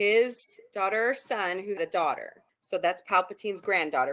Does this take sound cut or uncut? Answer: cut